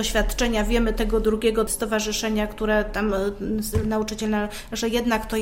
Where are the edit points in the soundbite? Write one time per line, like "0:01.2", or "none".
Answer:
none